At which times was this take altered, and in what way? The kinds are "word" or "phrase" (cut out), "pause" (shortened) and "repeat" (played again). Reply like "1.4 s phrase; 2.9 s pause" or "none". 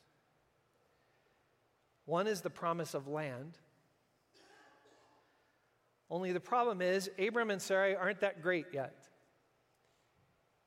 none